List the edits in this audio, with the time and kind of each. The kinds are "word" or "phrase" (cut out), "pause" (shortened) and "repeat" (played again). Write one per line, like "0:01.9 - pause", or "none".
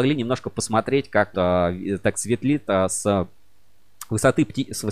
0:01.3 - word
0:02.1 - word